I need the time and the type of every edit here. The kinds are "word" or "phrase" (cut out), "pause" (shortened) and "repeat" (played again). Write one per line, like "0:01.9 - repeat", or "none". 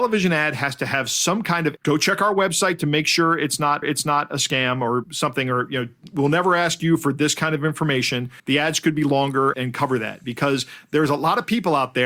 0:01.8 - phrase
0:03.8 - repeat
0:08.4 - pause
0:09.5 - word